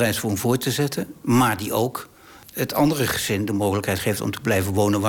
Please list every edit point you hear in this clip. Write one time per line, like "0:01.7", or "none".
none